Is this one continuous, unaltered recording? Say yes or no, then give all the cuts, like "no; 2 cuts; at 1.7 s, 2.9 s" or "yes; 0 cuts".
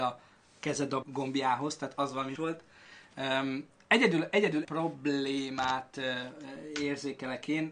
no; 4 cuts; at 1.0 s, 1.9 s, 2.4 s, 4.6 s